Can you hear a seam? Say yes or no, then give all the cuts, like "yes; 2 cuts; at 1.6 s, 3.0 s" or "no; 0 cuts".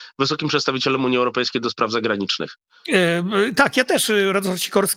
no; 0 cuts